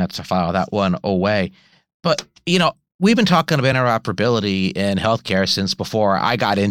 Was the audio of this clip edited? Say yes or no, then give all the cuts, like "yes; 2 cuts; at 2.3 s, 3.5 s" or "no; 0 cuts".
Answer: no; 0 cuts